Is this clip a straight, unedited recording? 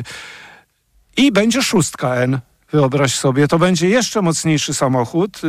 yes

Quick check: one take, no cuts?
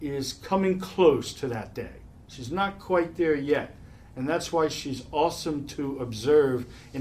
yes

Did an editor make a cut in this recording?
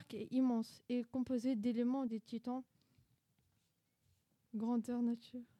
yes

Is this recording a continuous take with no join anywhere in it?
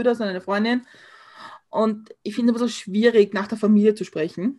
yes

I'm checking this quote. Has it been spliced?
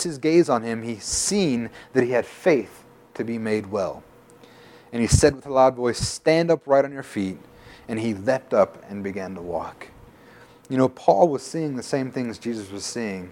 no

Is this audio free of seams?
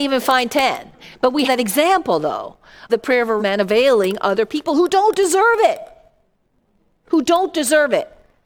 no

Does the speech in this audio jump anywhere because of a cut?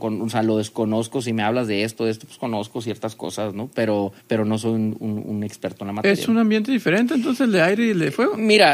yes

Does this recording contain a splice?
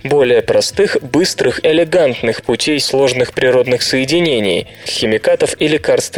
yes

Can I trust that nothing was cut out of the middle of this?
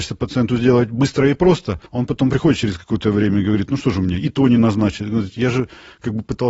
no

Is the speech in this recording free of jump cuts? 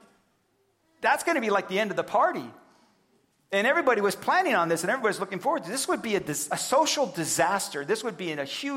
yes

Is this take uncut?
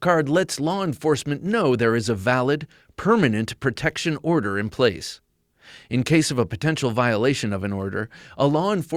yes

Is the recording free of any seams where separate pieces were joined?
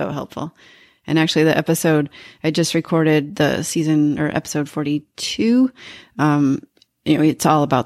yes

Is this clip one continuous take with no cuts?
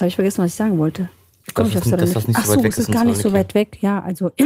yes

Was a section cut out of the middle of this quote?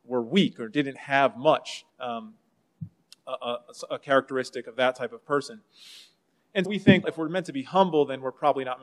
yes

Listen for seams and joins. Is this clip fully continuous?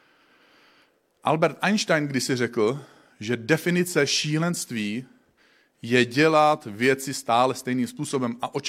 yes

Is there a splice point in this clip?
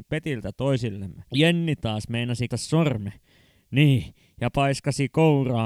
yes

